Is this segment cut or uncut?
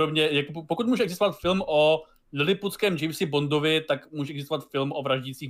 uncut